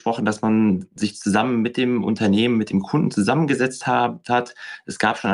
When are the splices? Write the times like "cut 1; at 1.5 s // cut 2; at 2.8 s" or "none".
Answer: none